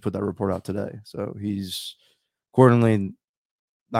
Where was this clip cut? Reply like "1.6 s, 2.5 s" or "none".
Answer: none